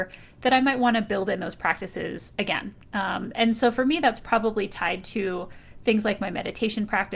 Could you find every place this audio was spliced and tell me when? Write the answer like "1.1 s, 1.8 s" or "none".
none